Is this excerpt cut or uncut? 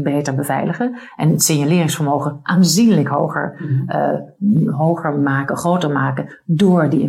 uncut